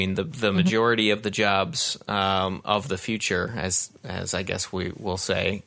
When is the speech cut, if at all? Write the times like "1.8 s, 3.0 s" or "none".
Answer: none